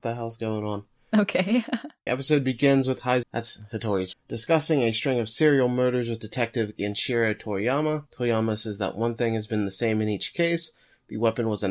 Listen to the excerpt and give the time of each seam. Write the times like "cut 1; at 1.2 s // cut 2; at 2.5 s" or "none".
cut 1; at 2.1 s // cut 2; at 3.2 s // cut 3; at 4.1 s // cut 4; at 8.1 s